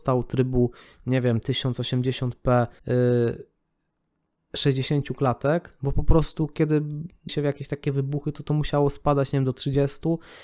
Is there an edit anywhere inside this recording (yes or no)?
yes